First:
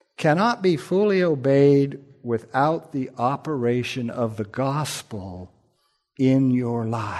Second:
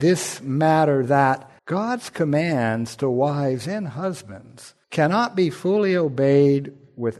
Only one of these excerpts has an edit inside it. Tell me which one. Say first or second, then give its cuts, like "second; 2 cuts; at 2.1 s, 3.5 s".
second; 2 cuts; at 1.6 s, 4.8 s